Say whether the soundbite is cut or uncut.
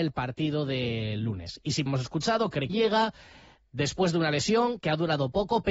cut